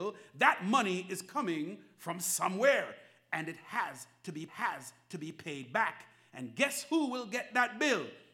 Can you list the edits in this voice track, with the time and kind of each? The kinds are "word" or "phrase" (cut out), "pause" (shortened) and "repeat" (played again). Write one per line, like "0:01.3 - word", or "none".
0:04.5 - repeat